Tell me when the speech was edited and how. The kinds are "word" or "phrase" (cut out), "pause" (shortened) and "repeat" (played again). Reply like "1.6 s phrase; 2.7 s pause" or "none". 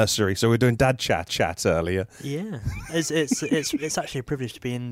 1.3 s repeat